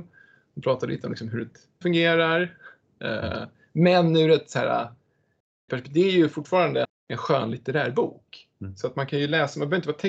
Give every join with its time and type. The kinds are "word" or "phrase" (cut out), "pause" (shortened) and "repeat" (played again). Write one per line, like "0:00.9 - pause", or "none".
0:01.8 - word
0:05.7 - word
0:06.8 - word